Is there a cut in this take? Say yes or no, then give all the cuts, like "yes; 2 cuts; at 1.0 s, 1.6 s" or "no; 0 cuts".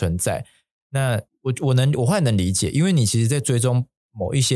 yes; 1 cut; at 1.3 s